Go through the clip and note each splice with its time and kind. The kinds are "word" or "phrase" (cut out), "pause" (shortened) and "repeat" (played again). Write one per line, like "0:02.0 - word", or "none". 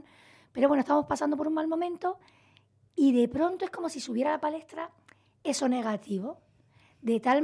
none